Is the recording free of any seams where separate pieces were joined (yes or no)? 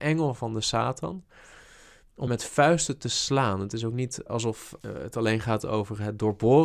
no